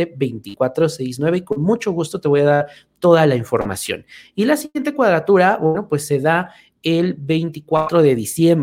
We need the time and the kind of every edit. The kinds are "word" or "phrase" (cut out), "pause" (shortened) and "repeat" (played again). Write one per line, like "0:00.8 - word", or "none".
none